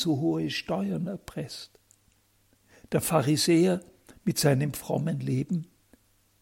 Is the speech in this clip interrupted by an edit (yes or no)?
no